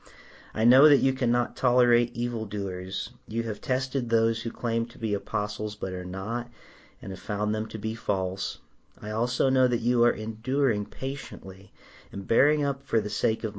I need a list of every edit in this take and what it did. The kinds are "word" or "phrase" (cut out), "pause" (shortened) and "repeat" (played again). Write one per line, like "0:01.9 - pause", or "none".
none